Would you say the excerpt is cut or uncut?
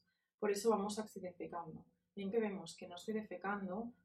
cut